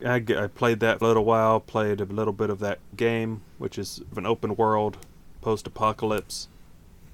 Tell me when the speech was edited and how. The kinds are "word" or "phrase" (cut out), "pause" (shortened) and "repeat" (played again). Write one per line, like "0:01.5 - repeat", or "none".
0:01.0 - phrase
0:02.9 - word
0:04.1 - word

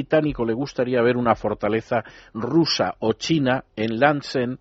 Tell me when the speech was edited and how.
none

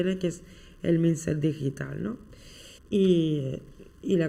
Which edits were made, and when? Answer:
0:02.8 - pause

